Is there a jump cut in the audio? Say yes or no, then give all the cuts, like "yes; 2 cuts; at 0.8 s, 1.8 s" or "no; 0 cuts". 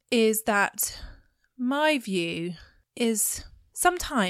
no; 0 cuts